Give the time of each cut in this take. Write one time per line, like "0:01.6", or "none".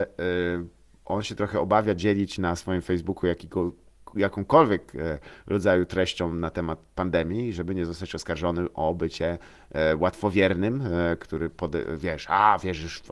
none

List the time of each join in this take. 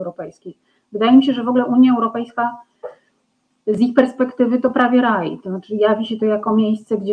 none

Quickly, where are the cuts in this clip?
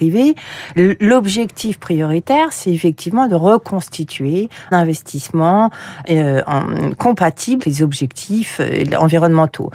0:04.7
0:06.0
0:07.6

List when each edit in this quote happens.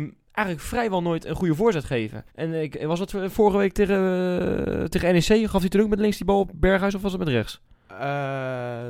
0:02.3

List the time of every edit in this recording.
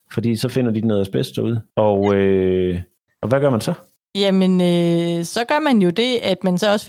0:01.7

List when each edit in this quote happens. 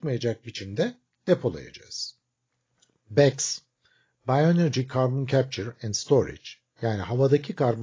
none

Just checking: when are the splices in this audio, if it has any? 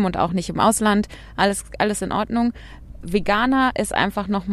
none

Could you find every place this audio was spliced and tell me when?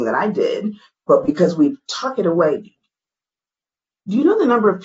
none

